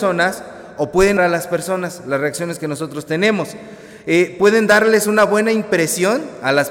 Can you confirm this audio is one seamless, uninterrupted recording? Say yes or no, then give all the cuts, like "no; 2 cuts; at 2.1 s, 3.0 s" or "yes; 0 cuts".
no; 1 cut; at 1.2 s